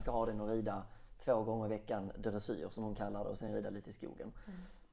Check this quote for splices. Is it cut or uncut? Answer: uncut